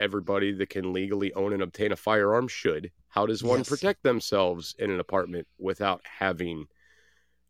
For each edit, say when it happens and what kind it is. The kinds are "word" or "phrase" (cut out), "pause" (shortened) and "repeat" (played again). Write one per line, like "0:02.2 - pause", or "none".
0:03.0 - pause